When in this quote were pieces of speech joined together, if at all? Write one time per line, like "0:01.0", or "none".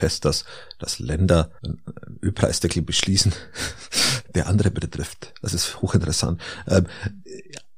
0:01.6